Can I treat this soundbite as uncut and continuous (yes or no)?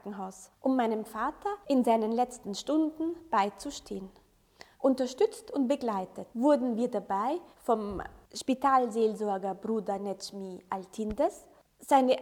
no